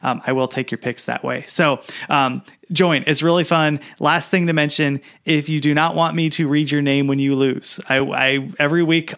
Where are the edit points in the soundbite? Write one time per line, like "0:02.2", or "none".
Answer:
none